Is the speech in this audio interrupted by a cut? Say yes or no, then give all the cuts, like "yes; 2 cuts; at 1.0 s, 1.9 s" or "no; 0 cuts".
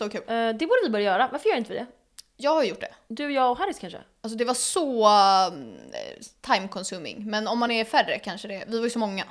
no; 0 cuts